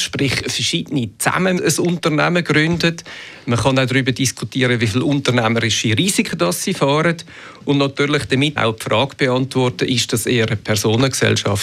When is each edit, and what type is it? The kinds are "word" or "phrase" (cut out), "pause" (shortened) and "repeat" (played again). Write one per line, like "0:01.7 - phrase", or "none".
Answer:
0:01.6 - word
0:08.6 - word

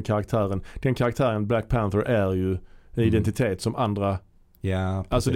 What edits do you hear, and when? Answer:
none

